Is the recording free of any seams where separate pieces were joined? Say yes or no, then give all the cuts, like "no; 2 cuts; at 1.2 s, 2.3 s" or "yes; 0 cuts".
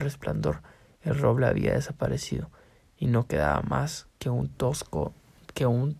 yes; 0 cuts